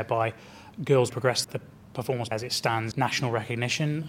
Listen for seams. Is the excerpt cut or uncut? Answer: cut